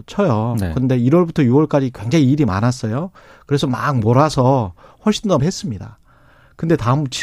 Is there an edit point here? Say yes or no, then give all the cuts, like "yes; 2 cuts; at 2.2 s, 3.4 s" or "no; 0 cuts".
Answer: yes; 1 cut; at 5.4 s